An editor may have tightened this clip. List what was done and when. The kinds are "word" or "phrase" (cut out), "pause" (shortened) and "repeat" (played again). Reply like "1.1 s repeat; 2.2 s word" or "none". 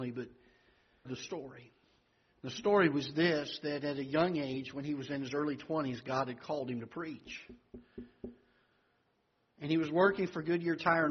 1.1 s phrase; 2.1 s pause